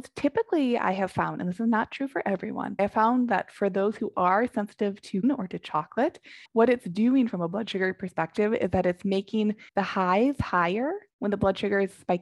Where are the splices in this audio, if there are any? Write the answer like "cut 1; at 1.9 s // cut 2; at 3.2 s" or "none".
cut 1; at 2.8 s // cut 2; at 5.2 s // cut 3; at 6.5 s // cut 4; at 9.7 s // cut 5; at 11.1 s

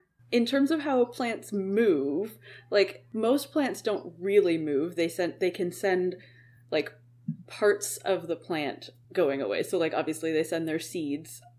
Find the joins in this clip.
none

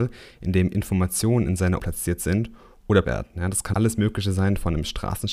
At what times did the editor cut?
cut 1; at 1.8 s // cut 2; at 3.0 s // cut 3; at 3.7 s

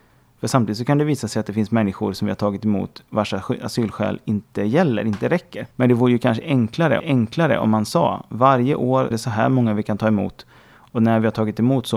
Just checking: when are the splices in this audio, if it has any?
cut 1; at 5.7 s // cut 2; at 7.0 s // cut 3; at 9.1 s

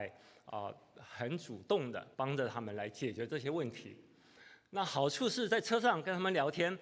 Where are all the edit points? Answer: cut 1; at 2.1 s

